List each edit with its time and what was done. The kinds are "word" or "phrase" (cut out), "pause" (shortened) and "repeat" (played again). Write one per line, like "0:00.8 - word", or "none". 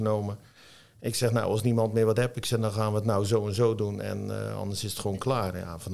none

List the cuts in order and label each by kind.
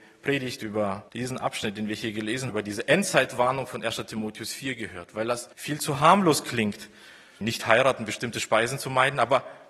0:01.1 - pause
0:02.5 - word
0:05.5 - pause
0:07.4 - word

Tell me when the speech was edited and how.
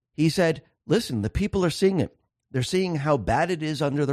none

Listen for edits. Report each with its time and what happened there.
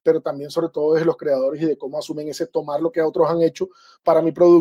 none

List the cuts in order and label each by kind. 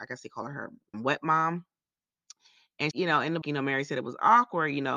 0:00.9 - word
0:02.9 - word
0:03.4 - word

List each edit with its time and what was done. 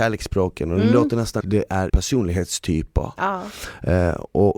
0:01.4 - phrase
0:01.9 - word

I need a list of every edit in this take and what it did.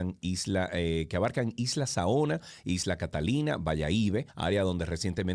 0:04.3 - pause

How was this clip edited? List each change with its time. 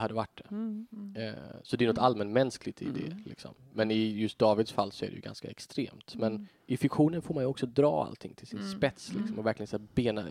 none

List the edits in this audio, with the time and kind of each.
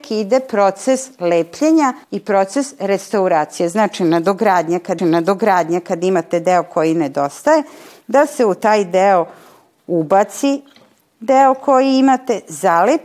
0:02.0 - pause
0:05.0 - repeat

